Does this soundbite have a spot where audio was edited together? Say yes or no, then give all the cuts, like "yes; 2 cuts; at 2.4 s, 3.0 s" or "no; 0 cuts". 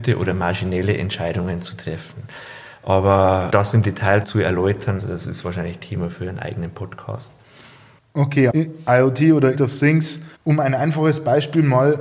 yes; 6 cuts; at 3.5 s, 4.2 s, 5.0 s, 8.5 s, 9.5 s, 10.3 s